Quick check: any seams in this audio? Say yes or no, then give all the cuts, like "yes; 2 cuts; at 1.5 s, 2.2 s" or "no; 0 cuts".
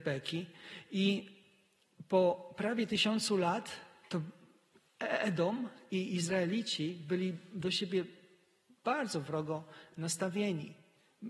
no; 0 cuts